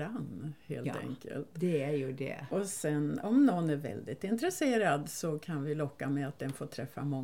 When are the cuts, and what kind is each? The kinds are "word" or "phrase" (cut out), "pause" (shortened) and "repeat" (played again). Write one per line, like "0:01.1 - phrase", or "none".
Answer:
none